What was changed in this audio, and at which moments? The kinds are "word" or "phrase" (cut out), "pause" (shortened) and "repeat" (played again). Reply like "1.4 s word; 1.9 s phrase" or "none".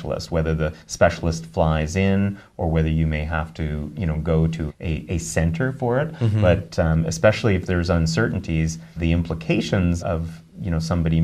4.7 s word; 9.0 s word; 10.0 s word